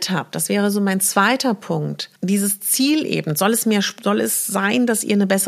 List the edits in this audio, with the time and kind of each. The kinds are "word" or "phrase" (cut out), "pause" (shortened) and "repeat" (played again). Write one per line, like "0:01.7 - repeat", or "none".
0:02.2 - pause